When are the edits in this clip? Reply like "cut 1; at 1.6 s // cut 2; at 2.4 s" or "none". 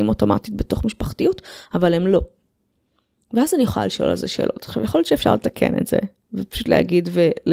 none